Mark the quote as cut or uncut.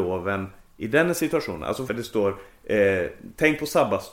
cut